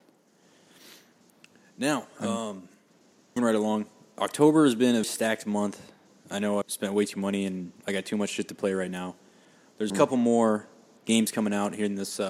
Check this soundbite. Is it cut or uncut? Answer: cut